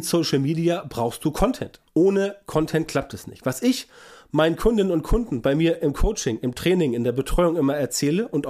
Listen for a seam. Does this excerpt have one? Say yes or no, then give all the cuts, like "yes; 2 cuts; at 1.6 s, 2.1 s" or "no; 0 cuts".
yes; 1 cut; at 1.9 s